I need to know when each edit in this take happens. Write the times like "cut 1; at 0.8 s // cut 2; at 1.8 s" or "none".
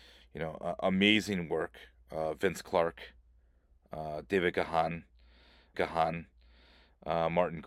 cut 1; at 5.7 s